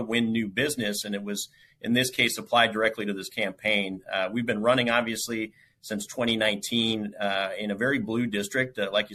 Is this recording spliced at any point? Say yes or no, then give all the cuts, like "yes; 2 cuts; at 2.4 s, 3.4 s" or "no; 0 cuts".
no; 0 cuts